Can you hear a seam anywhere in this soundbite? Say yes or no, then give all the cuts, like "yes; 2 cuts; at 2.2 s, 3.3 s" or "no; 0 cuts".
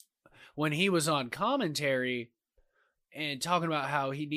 no; 0 cuts